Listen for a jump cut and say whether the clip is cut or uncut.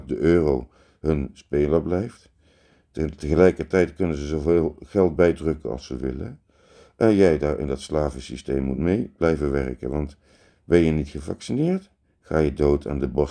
uncut